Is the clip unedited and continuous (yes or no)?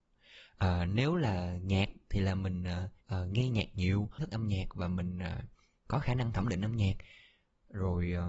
no